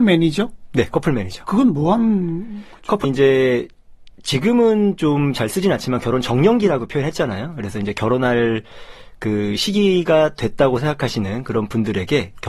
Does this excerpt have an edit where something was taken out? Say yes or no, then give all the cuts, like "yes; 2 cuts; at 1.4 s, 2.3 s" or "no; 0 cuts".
yes; 1 cut; at 3.0 s